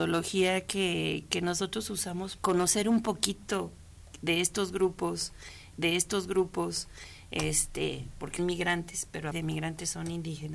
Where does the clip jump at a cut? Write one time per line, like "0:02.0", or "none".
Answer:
0:02.4
0:05.7
0:08.4
0:09.3